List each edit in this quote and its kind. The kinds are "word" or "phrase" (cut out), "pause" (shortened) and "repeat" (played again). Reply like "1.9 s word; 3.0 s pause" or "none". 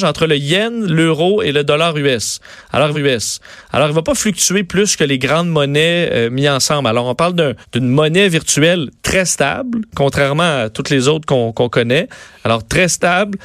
2.9 s repeat; 7.6 s pause